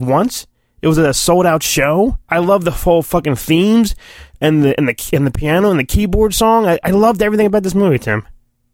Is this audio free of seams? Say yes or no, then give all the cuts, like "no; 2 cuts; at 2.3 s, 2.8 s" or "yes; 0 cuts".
no; 1 cut; at 2.2 s